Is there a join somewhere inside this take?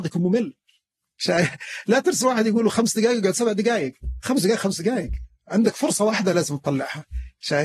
no; 0 cuts

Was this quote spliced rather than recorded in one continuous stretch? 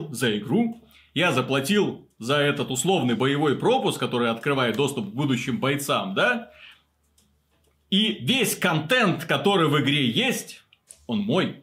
no; 0 cuts

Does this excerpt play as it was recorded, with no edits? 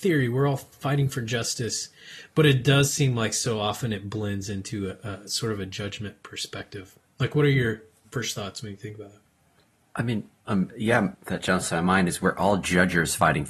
no; 2 cuts; at 10.4 s, 11.1 s

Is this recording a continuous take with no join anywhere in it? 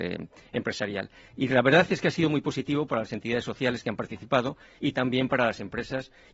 yes; 0 cuts

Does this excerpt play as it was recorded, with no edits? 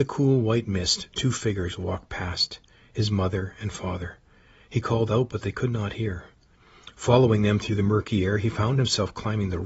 yes; 0 cuts

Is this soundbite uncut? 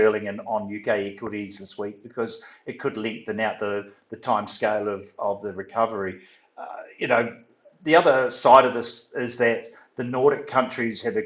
yes; 0 cuts

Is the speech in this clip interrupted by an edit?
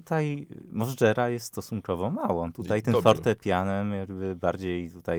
no; 0 cuts

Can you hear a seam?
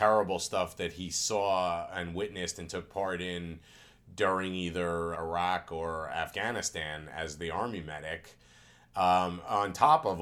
yes; 1 cut; at 5.1 s

